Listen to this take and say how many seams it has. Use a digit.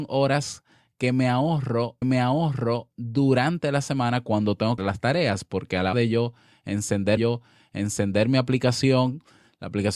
4